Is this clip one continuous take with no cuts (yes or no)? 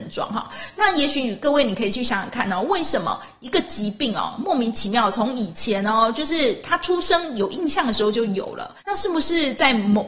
no